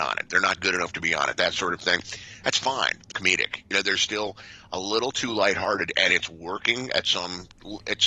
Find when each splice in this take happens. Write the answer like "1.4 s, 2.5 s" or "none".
3.1 s